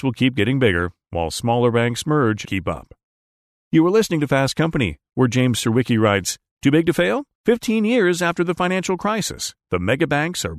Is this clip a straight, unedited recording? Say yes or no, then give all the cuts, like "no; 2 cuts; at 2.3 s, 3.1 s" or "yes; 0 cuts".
no; 2 cuts; at 2.4 s, 7.3 s